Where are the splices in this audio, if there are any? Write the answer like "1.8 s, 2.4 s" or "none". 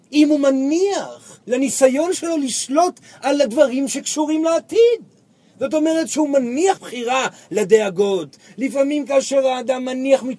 1.4 s, 6.8 s